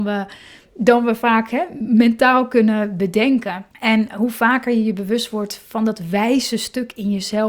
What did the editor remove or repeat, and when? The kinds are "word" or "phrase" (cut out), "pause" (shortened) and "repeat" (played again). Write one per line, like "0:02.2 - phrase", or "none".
0:03.7 - pause